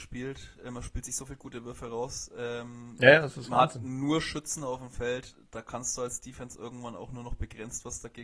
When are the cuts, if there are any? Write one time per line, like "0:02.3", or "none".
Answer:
none